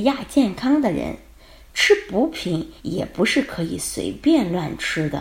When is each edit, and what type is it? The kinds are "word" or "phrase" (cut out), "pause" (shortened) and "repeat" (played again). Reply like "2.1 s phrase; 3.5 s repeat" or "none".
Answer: 2.8 s pause